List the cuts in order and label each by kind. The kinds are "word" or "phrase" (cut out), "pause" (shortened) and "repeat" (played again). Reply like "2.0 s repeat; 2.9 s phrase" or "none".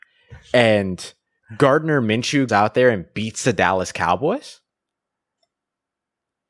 2.5 s word